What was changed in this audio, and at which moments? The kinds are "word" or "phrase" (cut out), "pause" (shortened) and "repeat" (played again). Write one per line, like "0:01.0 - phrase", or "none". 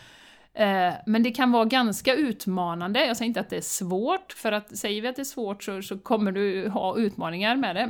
none